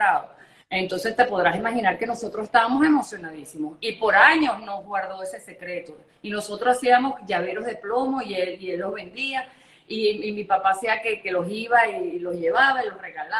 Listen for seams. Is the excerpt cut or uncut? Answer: uncut